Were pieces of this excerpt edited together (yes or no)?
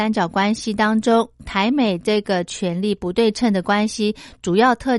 no